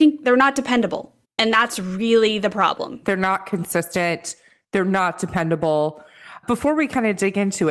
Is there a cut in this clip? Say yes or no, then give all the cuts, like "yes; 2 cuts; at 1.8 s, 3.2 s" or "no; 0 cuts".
no; 0 cuts